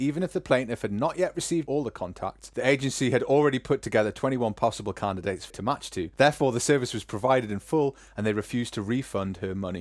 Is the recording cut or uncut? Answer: cut